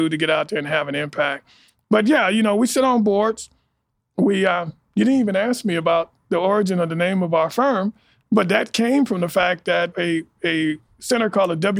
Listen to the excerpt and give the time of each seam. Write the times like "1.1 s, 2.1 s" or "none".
9.9 s